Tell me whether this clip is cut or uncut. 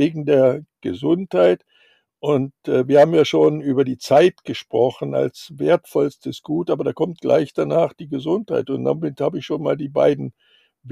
uncut